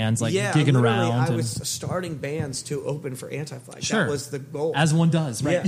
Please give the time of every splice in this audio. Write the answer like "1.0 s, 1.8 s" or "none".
none